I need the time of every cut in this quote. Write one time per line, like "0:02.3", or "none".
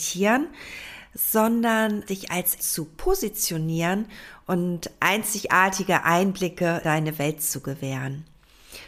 0:02.0
0:02.6
0:06.8